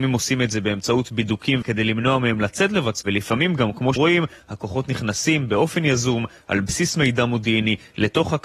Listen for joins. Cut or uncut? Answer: cut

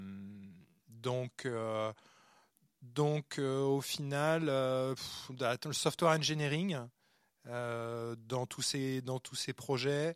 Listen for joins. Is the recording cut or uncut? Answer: uncut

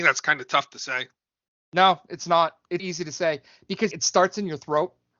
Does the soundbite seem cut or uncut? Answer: cut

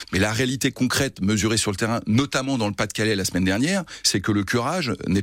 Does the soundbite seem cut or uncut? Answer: uncut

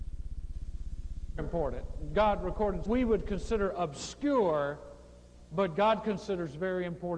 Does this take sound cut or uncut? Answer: cut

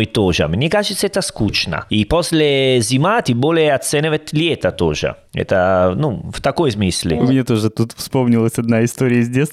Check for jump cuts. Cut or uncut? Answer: uncut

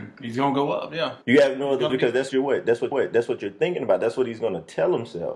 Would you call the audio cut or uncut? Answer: cut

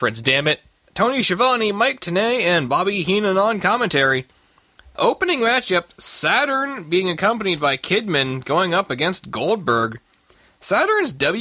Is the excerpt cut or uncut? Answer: uncut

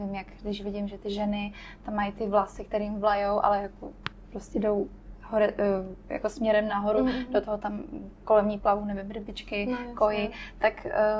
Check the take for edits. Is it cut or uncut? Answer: uncut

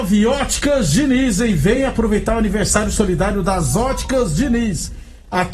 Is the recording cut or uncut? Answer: uncut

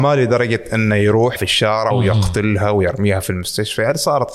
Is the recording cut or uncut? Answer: cut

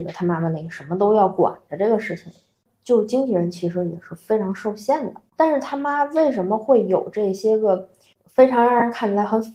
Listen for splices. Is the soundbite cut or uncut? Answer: uncut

